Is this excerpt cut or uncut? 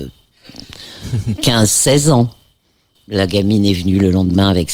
cut